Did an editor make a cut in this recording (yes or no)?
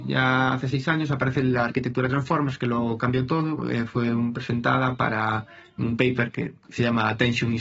no